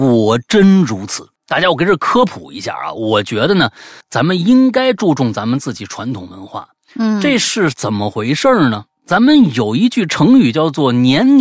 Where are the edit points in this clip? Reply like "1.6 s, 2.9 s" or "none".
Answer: 1.4 s, 4.0 s